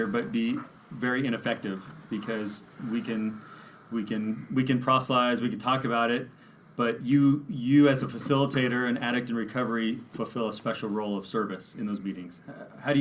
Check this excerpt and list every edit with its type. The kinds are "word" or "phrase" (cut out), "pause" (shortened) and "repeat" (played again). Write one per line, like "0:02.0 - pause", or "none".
none